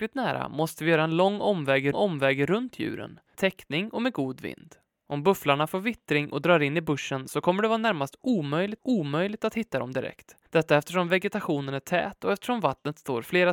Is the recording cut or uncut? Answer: cut